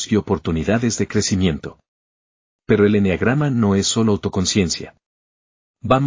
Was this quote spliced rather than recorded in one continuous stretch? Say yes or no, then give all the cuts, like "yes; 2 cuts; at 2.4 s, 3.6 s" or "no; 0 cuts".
no; 0 cuts